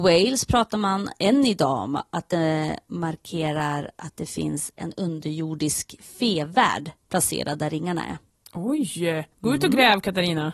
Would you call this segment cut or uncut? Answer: cut